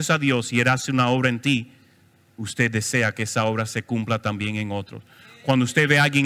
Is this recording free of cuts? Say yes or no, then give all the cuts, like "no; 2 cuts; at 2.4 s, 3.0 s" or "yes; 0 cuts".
yes; 0 cuts